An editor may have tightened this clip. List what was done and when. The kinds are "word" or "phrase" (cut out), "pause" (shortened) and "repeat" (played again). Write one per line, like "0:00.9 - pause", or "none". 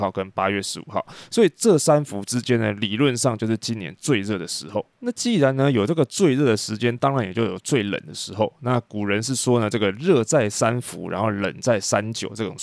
0:04.9 - pause